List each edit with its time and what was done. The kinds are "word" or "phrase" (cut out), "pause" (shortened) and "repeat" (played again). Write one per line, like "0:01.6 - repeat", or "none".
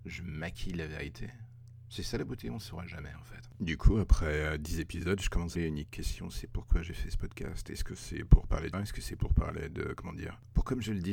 0:05.5 - phrase
0:08.7 - word